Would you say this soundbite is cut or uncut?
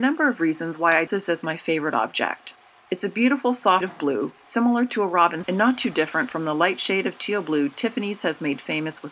cut